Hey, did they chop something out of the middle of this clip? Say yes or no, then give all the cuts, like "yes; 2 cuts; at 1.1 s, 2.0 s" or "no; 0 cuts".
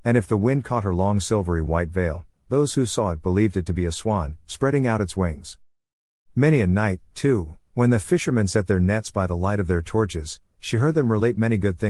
no; 0 cuts